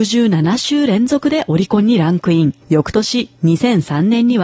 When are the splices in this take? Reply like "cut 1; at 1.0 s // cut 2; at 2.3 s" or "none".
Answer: cut 1; at 2.6 s

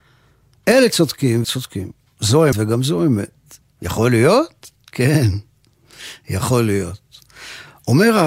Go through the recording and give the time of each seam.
cut 1; at 1.4 s // cut 2; at 2.5 s // cut 3; at 3.6 s // cut 4; at 4.8 s

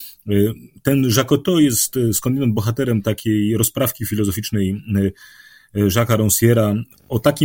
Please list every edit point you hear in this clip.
none

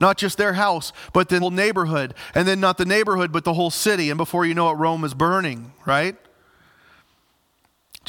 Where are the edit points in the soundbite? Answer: cut 1; at 1.4 s

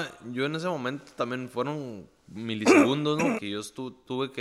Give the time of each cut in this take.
cut 1; at 3.4 s

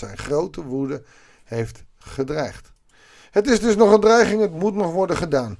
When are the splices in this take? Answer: none

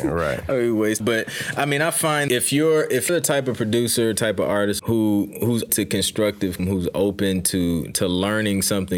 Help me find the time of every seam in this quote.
cut 1; at 1.0 s // cut 2; at 2.3 s // cut 3; at 3.1 s // cut 4; at 4.8 s // cut 5; at 5.7 s // cut 6; at 6.6 s

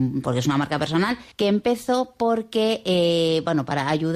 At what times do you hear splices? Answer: cut 1; at 1.3 s

